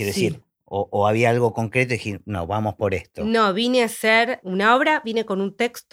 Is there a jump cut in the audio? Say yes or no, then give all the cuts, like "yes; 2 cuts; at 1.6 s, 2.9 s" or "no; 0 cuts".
no; 0 cuts